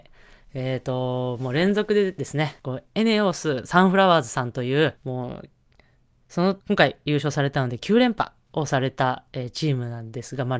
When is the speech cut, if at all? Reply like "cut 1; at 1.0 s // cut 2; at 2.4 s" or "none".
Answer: cut 1; at 2.6 s // cut 2; at 5.0 s // cut 3; at 6.6 s